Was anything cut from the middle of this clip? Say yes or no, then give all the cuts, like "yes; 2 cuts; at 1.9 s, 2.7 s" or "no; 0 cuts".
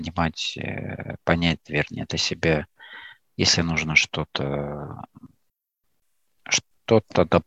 no; 0 cuts